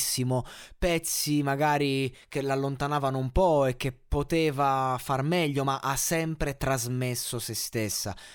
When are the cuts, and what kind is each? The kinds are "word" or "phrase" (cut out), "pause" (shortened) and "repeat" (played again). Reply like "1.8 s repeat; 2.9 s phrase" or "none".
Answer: none